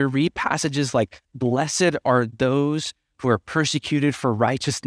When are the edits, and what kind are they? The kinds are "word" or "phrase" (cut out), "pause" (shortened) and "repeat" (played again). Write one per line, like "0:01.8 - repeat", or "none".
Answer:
0:01.2 - pause